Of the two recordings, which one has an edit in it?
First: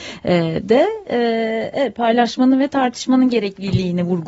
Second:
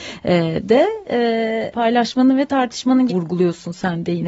second; 2 cuts; at 1.7 s, 3.1 s

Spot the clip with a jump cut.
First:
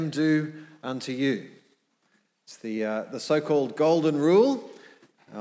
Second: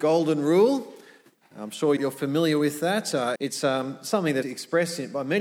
second; 3 cuts; at 2.0 s, 3.4 s, 4.4 s

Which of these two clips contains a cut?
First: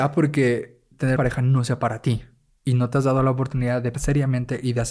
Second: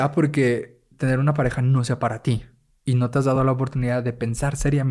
first; 2 cuts; at 1.2 s, 3.9 s

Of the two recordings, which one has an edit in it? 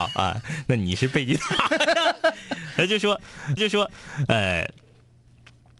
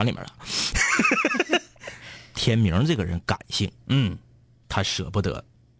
first; 1 cut; at 3.6 s

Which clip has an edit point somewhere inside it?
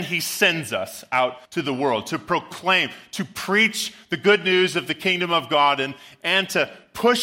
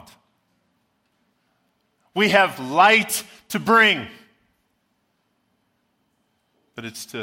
first; 1 cut; at 1.4 s

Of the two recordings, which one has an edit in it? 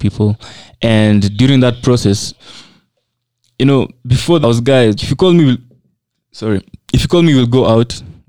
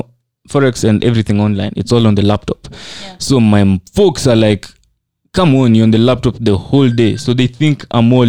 first; 2 cuts; at 4.4 s, 5.0 s

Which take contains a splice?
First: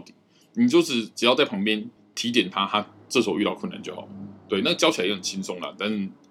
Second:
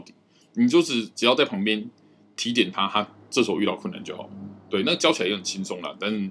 first; 1 cut; at 2.0 s

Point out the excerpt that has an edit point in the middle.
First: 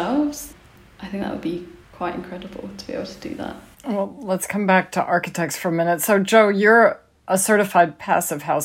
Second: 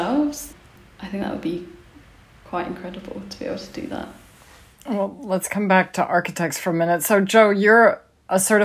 first; 2 cuts; at 1.8 s, 3.7 s

